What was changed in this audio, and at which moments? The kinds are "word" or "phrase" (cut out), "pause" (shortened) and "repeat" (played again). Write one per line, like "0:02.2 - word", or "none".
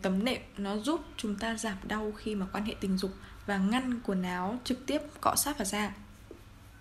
none